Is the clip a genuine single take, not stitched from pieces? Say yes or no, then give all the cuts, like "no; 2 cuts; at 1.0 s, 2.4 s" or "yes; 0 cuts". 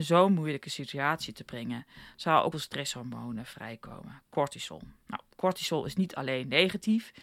no; 2 cuts; at 2.5 s, 5.0 s